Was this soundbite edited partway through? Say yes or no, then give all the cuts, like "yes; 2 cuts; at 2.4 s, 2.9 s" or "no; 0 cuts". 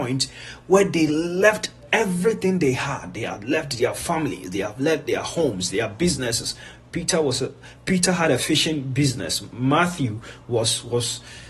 yes; 1 cut; at 7.8 s